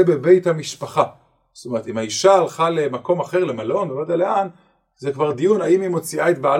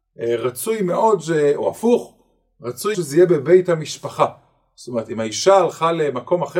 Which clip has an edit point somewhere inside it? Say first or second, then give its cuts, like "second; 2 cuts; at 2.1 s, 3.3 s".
second; 1 cut; at 2.9 s